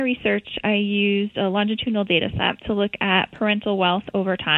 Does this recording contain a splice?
yes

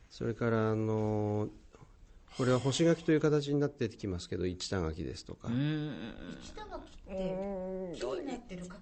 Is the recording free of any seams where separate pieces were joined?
yes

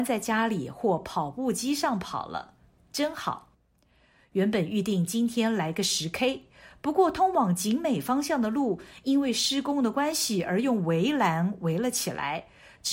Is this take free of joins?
yes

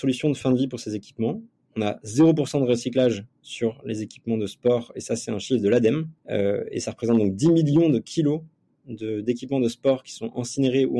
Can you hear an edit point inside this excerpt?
no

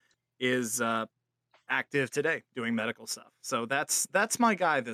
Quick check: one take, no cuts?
yes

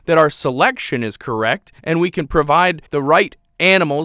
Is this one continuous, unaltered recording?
no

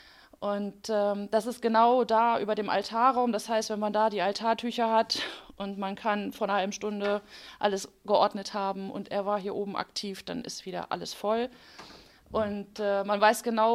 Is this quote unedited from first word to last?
yes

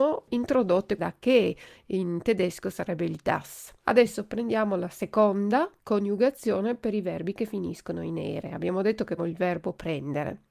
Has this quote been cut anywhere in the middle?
yes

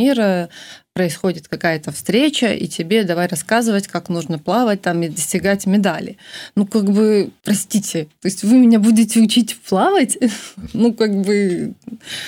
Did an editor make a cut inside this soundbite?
no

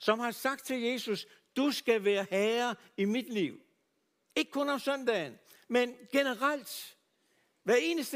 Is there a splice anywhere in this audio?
no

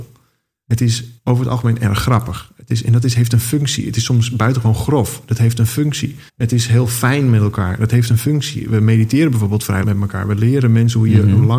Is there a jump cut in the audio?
yes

